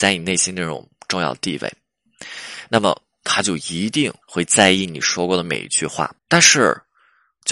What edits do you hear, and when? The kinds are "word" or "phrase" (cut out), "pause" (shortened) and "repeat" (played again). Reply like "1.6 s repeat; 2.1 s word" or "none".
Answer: 4.2 s pause; 6.2 s pause